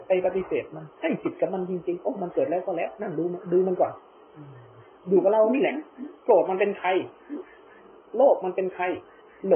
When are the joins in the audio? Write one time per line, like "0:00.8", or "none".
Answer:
0:00.9
0:06.2